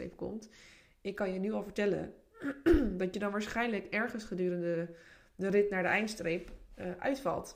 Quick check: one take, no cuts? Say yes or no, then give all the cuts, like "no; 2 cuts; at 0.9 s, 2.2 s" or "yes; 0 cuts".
yes; 0 cuts